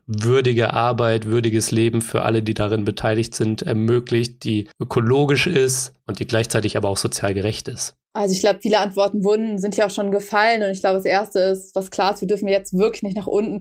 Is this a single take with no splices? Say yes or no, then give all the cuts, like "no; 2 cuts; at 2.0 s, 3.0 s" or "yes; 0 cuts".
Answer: no; 2 cuts; at 4.7 s, 8.0 s